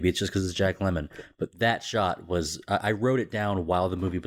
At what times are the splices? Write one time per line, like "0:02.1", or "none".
none